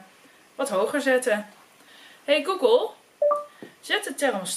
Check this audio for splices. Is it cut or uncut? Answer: uncut